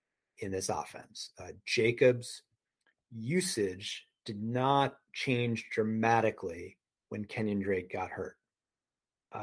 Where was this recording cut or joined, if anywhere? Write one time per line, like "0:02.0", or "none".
none